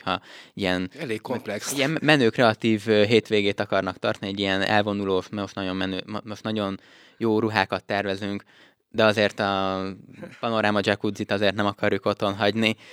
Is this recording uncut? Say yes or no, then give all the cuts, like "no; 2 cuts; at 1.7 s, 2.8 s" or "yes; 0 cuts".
yes; 0 cuts